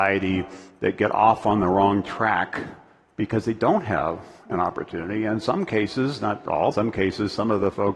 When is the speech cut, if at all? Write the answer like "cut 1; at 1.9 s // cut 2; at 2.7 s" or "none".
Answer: cut 1; at 6.7 s

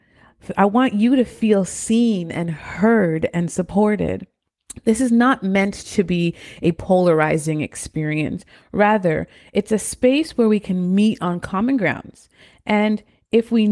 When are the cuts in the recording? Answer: none

